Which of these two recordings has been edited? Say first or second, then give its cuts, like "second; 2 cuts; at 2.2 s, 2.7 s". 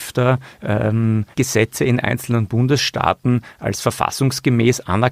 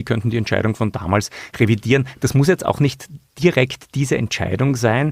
first; 1 cut; at 1.3 s